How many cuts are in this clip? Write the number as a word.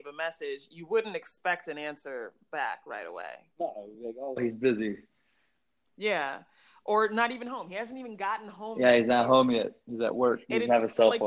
zero